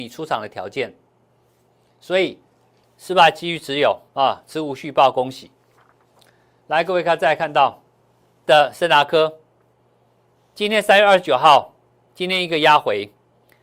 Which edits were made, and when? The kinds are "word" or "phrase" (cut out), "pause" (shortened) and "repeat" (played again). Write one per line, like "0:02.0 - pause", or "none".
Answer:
0:02.8 - pause
0:04.1 - pause
0:08.4 - word